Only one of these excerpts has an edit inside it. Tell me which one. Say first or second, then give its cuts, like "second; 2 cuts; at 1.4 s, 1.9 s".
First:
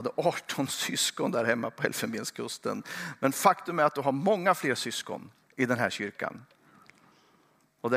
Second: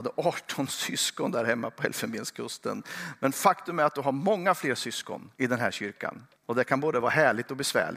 second; 2 cuts; at 5.3 s, 6.4 s